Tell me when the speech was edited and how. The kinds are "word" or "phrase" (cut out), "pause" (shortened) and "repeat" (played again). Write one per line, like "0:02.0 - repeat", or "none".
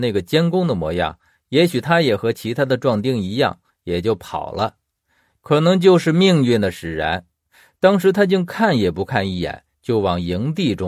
none